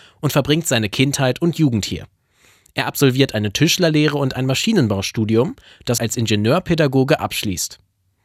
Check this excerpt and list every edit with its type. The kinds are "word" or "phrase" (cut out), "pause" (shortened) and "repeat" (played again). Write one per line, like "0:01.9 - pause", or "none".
0:06.0 - word